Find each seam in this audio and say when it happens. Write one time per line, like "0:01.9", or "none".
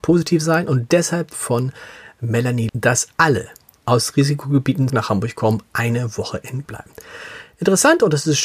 0:01.3
0:02.7
0:03.8
0:04.9
0:06.6